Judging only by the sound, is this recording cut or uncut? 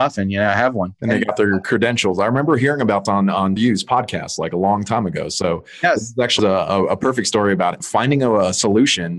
cut